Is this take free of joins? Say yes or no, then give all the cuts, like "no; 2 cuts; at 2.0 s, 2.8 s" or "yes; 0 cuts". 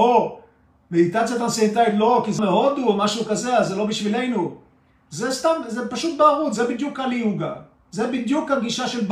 no; 1 cut; at 2.4 s